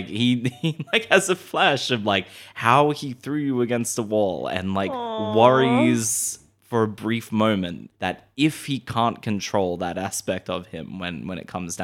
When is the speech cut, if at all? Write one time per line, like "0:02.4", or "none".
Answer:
0:07.9